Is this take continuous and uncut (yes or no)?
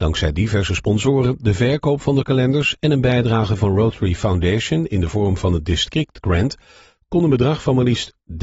yes